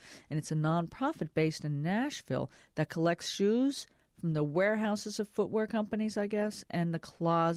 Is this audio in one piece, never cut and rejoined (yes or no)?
yes